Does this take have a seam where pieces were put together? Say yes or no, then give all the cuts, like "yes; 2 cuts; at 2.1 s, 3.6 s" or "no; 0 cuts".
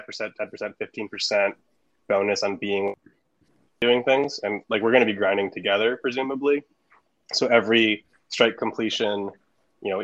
no; 0 cuts